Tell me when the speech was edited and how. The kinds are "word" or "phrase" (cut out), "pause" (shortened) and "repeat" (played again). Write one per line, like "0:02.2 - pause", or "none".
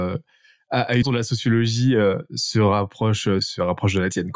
0:01.0 - word
0:03.4 - word

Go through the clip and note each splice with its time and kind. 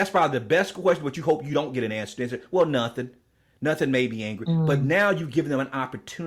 none

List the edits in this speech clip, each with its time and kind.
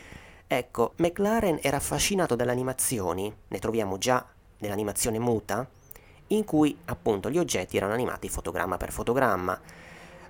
0:00.9 - word

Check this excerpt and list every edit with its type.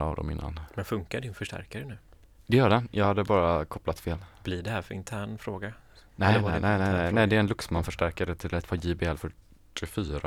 none

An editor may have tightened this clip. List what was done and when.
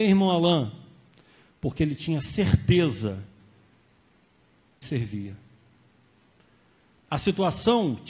0:04.8 - phrase

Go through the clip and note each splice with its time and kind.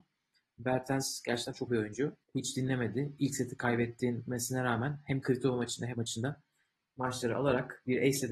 0:01.7 - word
0:02.2 - pause
0:05.9 - word

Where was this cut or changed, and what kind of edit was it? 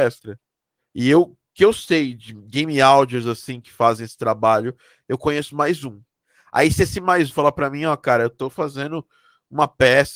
0:07.3 - word

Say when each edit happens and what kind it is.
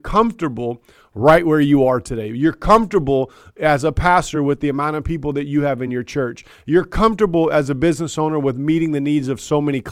none

